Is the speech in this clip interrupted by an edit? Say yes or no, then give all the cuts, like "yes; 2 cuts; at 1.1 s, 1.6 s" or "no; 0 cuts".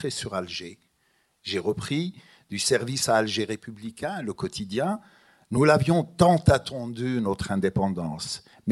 no; 0 cuts